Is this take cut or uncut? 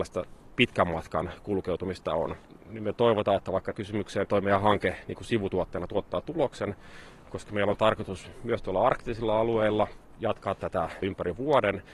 cut